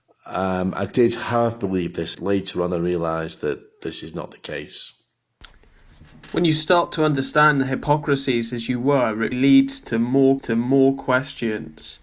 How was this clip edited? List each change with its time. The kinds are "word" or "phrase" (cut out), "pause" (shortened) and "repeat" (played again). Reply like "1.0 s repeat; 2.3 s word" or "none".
2.1 s phrase; 9.3 s word; 10.4 s repeat